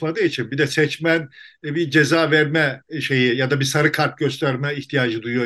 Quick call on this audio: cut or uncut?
uncut